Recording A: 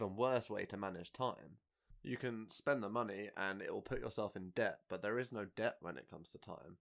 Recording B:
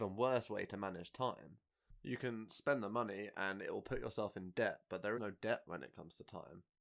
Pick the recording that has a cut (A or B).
B